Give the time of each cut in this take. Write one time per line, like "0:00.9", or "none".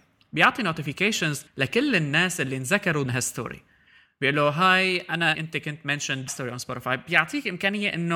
0:01.5
0:03.1
0:05.3
0:06.3